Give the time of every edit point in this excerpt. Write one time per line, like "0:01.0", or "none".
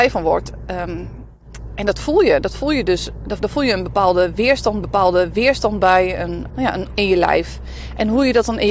0:03.4
0:04.8
0:06.5
0:06.9